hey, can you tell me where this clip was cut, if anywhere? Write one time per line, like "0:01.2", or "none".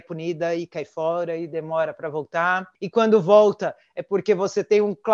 0:02.7